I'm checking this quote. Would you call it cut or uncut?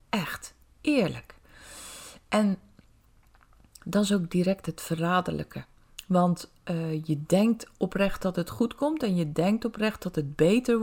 uncut